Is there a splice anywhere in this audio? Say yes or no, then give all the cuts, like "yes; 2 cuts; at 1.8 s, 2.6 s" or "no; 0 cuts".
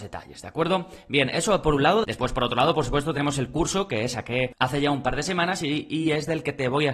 no; 0 cuts